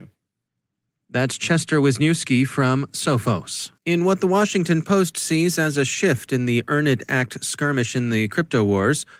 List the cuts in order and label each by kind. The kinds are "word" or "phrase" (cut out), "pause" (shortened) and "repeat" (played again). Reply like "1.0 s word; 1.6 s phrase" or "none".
3.8 s pause